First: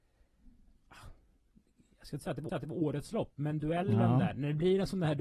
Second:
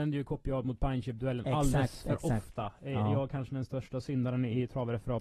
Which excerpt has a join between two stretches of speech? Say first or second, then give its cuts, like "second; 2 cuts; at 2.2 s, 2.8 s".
first; 1 cut; at 2.5 s